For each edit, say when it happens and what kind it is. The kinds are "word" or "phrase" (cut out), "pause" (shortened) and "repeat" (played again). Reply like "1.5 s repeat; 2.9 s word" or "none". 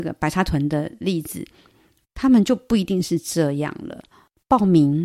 none